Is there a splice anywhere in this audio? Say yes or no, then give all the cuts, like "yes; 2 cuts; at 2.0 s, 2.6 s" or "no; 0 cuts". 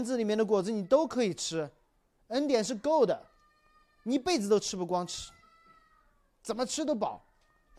no; 0 cuts